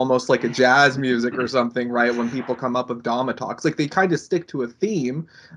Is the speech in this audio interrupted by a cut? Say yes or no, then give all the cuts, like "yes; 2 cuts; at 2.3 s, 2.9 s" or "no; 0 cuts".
no; 0 cuts